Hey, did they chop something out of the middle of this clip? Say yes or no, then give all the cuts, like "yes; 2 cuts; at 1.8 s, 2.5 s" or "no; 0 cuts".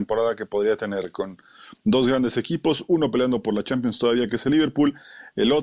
no; 0 cuts